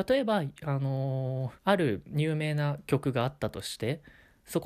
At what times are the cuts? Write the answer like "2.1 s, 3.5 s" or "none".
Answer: 1.6 s